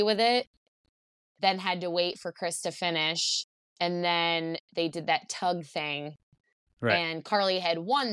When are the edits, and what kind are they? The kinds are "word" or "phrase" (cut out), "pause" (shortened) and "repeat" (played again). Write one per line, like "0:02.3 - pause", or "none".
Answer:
none